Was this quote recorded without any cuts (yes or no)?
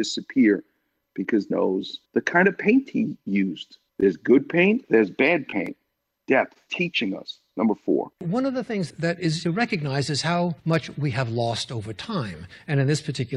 no